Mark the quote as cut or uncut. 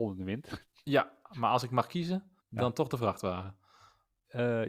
cut